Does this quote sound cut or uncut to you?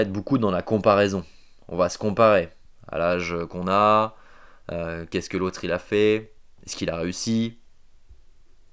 uncut